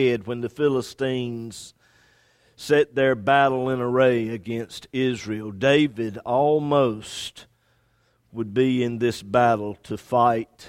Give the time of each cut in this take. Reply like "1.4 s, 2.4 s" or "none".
none